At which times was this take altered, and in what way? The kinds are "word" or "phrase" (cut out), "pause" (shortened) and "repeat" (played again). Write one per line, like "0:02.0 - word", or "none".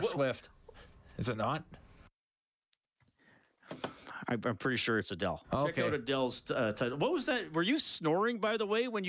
none